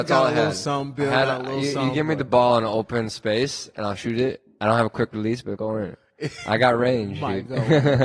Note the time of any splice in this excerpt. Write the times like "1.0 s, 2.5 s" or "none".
5.6 s

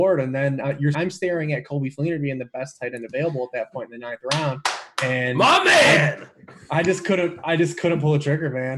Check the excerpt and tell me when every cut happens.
0.9 s

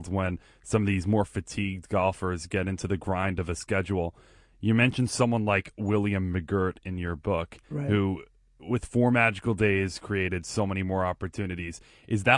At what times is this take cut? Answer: none

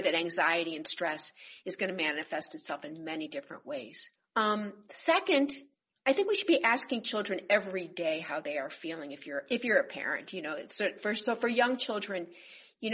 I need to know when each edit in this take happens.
4.2 s, 5.9 s

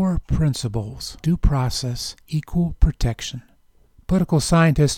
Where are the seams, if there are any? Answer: 1.2 s, 2.3 s

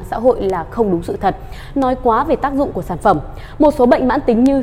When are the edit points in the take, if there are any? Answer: none

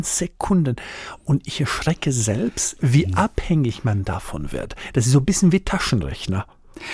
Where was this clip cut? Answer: none

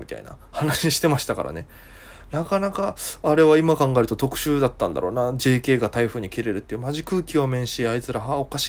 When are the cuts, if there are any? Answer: none

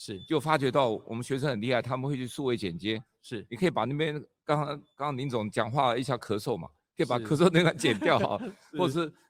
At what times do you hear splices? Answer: none

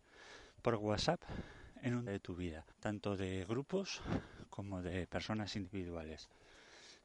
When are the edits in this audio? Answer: 2.1 s, 2.7 s

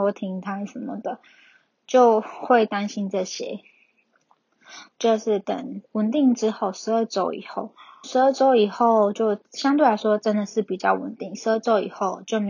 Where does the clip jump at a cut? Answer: 4.9 s, 8.0 s

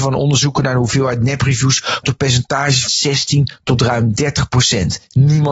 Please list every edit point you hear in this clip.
2.0 s, 2.9 s

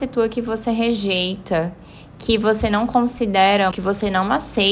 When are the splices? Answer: 3.7 s

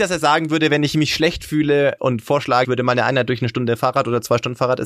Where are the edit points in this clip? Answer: 2.0 s, 2.6 s

